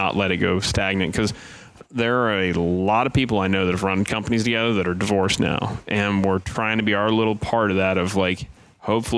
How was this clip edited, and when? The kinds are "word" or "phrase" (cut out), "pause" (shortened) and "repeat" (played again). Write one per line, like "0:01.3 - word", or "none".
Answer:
none